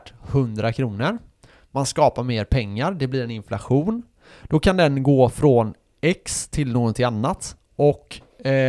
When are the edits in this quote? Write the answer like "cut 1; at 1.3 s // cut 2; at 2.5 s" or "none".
none